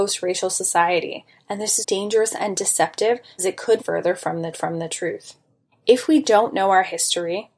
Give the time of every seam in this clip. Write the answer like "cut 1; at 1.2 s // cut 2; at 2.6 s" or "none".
cut 1; at 1.8 s // cut 2; at 3.4 s // cut 3; at 3.8 s // cut 4; at 4.5 s